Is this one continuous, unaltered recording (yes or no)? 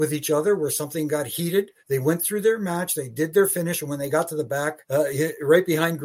no